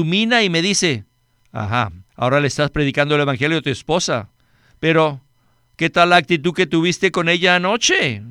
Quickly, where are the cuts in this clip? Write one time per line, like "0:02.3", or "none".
0:02.1